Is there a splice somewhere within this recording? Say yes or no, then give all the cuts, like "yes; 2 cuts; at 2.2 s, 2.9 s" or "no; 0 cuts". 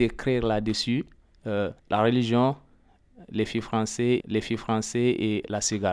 yes; 2 cuts; at 1.8 s, 4.2 s